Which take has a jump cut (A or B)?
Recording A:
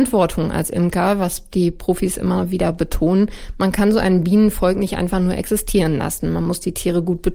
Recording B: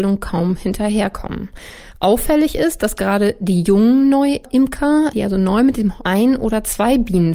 B